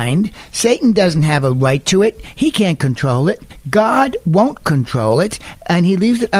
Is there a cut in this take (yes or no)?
no